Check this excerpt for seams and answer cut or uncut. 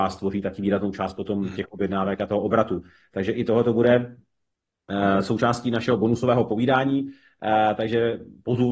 uncut